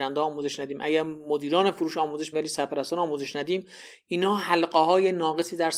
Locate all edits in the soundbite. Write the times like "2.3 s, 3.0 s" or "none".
2.3 s